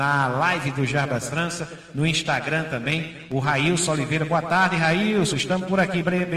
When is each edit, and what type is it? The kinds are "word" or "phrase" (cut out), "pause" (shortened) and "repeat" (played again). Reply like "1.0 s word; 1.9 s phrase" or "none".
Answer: none

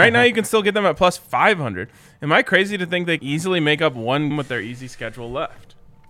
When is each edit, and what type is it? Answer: 3.2 s word; 4.3 s word

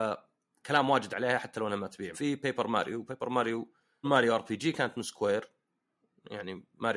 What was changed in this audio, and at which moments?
2.1 s word; 4.0 s word

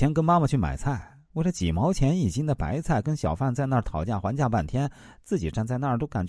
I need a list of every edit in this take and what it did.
none

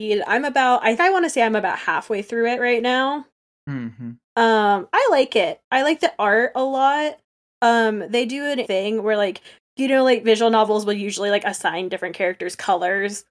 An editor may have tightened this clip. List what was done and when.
1.0 s word; 8.6 s word

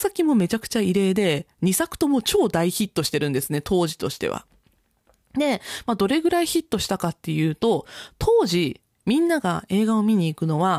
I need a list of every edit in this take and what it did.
none

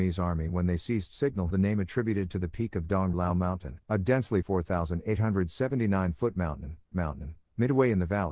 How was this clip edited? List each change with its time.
1.5 s word; 3.1 s word; 3.8 s pause; 4.4 s word; 6.9 s repeat

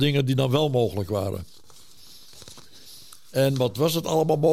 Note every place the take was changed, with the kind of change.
none

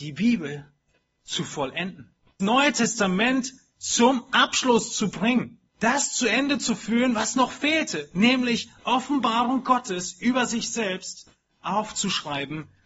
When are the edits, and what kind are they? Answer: 2.4 s word; 5.7 s pause

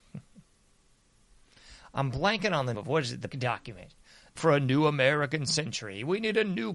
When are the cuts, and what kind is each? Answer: 2.7 s word; 3.3 s word; 4.4 s word

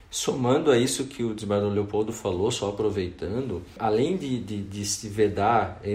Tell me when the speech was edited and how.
none

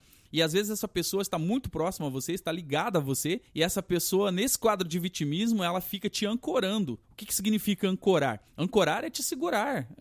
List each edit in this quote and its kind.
3.5 s pause; 7.0 s pause; 8.5 s pause

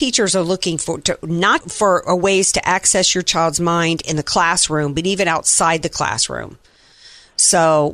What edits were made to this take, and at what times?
1.6 s word

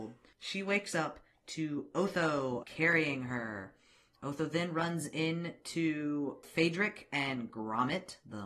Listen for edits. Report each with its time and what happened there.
none

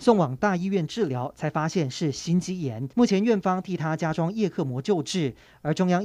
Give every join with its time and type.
2.9 s pause

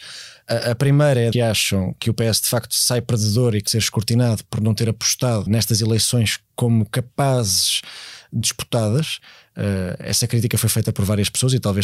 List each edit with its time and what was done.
1.3 s phrase; 3.7 s word; 5.5 s word; 8.4 s word

